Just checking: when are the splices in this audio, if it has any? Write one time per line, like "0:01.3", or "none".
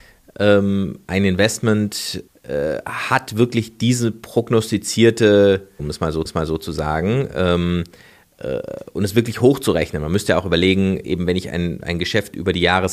0:02.3
0:05.8
0:06.3